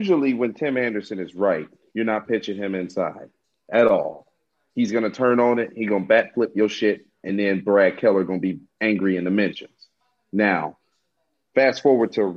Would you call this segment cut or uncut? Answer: uncut